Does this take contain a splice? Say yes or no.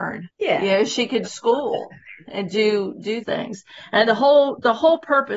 yes